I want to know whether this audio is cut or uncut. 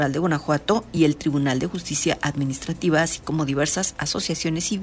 uncut